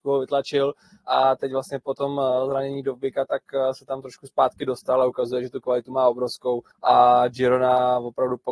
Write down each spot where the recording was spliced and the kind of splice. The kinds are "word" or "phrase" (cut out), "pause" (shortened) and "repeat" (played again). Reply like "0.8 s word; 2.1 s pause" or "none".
6.7 s pause

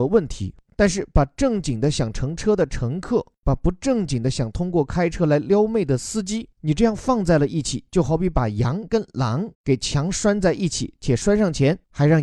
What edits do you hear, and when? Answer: 6.5 s pause; 9.5 s pause

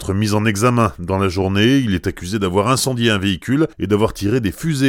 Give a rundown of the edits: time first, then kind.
3.7 s pause

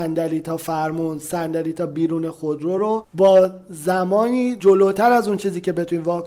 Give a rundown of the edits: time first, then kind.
none

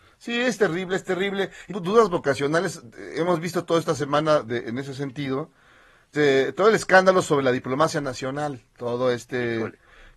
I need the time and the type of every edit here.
1.7 s phrase; 6.1 s word

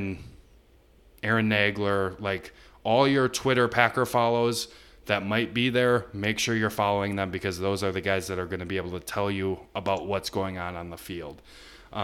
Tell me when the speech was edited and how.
none

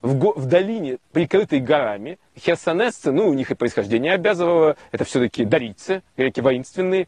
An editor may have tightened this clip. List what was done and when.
1.0 s pause; 2.3 s pause

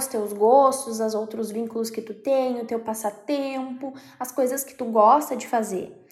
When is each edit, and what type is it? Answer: none

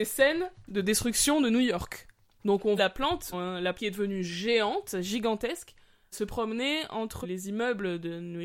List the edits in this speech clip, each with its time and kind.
2.8 s word; 3.3 s word; 3.7 s word; 6.1 s word; 7.2 s word

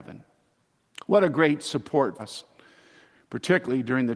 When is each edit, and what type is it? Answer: 2.2 s word

